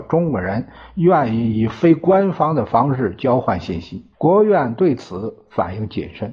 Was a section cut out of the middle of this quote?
yes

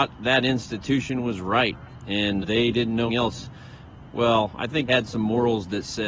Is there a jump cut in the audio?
yes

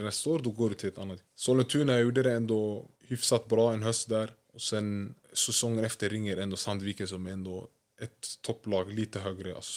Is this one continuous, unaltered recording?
no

